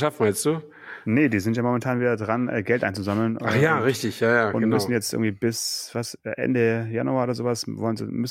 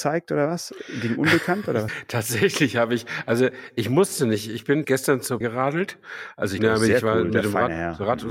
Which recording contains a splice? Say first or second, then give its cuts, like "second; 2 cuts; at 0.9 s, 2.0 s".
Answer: second; 4 cuts; at 1.9 s, 4.8 s, 5.4 s, 6.6 s